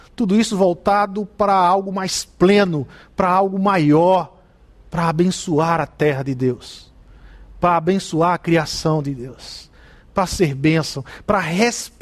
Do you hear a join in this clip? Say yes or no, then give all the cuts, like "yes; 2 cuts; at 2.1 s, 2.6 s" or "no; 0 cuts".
no; 0 cuts